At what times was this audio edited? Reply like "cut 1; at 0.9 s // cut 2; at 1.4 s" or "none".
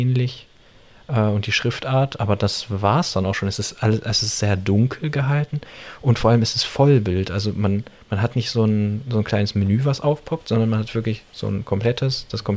cut 1; at 7.9 s